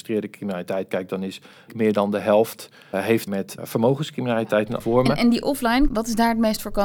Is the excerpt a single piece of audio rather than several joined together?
no; 6 cuts; at 1.7 s, 2.9 s, 3.3 s, 3.6 s, 4.8 s, 5.9 s

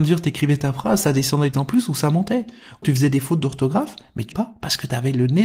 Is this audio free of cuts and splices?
no; 3 cuts; at 1.5 s, 2.8 s, 4.3 s

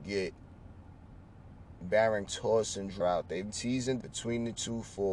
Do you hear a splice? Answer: yes; 4 cuts; at 2.3 s, 3.0 s, 3.5 s, 4.0 s

